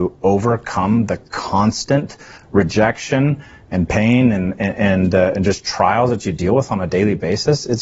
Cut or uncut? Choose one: uncut